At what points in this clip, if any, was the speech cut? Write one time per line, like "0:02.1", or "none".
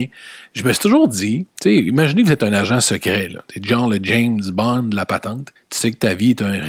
0:05.6